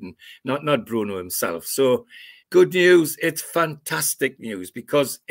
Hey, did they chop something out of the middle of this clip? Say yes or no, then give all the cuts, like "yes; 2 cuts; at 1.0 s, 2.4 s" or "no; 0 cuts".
yes; 1 cut; at 2.4 s